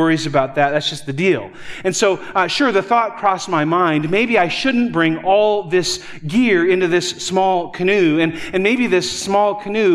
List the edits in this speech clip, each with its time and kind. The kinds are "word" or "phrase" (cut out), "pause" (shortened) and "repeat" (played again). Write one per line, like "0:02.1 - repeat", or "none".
none